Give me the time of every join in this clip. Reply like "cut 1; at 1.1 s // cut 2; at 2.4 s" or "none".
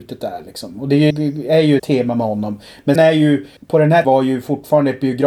cut 1; at 1.1 s // cut 2; at 1.8 s // cut 3; at 2.9 s // cut 4; at 3.6 s // cut 5; at 4.0 s